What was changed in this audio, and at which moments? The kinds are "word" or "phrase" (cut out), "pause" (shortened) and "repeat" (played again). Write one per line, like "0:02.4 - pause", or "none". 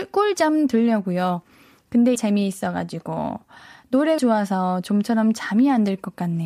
0:02.1 - word
0:04.2 - word

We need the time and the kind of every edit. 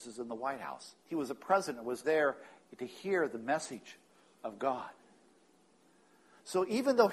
0:01.0 - pause
0:02.0 - word
0:04.1 - pause

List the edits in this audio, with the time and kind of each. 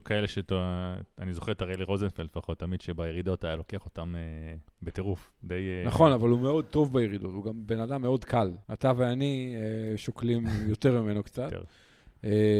0:08.6 - pause

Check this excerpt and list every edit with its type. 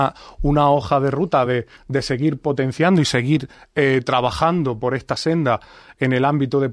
none

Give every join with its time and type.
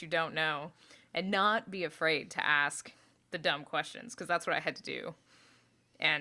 none

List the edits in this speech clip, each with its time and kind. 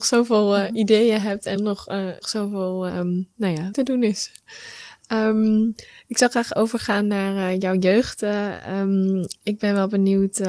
0:01.6 - word
0:02.2 - word
0:02.9 - word
0:03.7 - word

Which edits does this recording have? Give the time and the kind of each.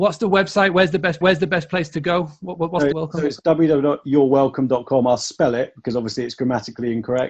0:01.2 - repeat
0:02.9 - phrase

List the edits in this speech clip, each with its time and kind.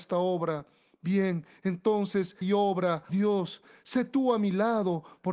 0:02.4 - word
0:03.1 - word

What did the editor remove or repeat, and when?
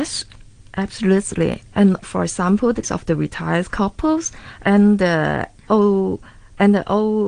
0:02.0 - word
0:02.8 - word

